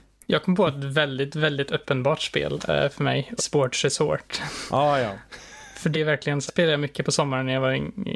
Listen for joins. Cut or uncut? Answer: cut